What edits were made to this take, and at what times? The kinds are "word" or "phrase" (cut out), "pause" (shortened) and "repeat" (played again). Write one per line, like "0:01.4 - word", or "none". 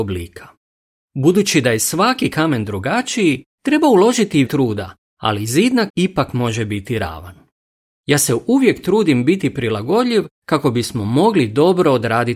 0:04.5 - word
0:05.9 - word

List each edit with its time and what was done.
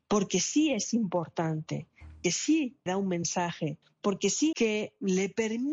0:02.2 - word
0:02.9 - word
0:03.8 - pause
0:04.5 - phrase

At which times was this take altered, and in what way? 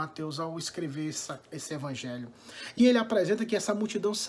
0:02.8 - word

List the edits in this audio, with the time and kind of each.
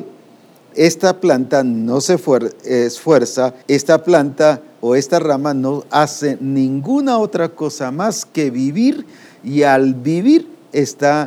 0:03.6 - pause

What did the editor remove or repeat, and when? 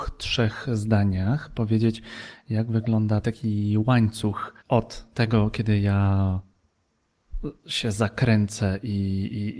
0:03.2 - word
0:04.6 - pause

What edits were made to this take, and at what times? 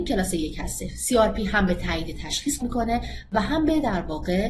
0:02.6 - word

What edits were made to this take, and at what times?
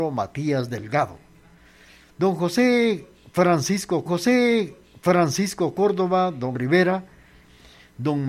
0:04.1 - repeat
0:06.5 - word

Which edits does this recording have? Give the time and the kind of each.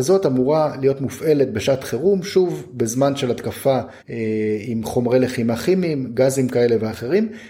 0:04.0 - pause

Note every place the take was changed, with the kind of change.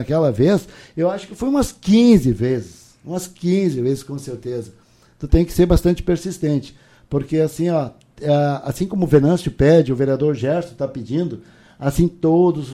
none

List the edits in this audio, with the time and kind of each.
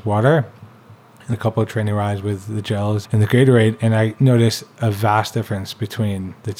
0:01.3 - word
0:03.0 - word

